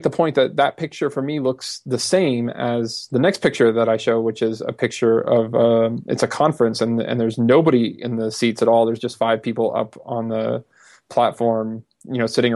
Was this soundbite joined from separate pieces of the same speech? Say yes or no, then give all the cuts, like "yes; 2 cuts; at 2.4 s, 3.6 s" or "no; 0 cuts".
no; 0 cuts